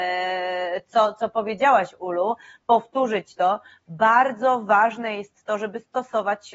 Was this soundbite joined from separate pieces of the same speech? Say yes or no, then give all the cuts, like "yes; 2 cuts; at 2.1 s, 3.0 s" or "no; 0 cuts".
no; 0 cuts